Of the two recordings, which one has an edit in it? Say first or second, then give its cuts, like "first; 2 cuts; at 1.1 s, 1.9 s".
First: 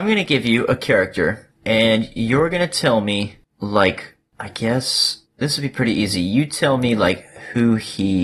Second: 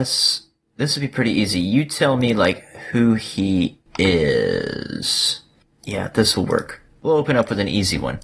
first; 1 cut; at 5.3 s